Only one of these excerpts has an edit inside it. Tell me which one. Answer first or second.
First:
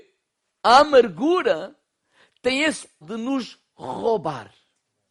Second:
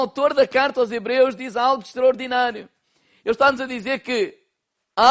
first